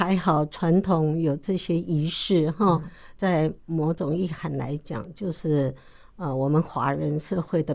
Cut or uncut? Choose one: cut